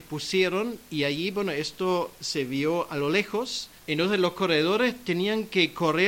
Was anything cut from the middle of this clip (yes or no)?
yes